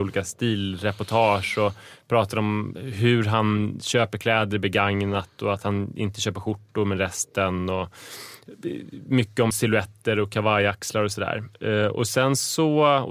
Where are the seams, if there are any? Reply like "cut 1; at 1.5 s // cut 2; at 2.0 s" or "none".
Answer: cut 1; at 9.5 s